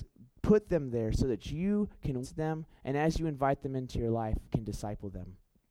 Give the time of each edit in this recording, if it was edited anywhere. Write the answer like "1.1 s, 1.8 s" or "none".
2.2 s, 4.5 s